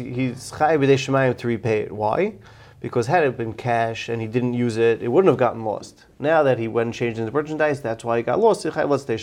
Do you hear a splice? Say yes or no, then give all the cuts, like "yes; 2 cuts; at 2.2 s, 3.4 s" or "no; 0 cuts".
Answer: no; 0 cuts